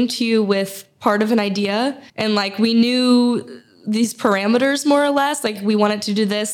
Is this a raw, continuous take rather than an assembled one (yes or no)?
no